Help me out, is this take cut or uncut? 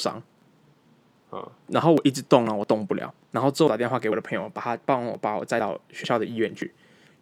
cut